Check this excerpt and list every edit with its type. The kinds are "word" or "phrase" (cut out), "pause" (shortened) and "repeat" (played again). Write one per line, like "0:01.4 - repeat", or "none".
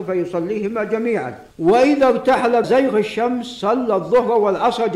0:01.5 - pause
0:02.6 - word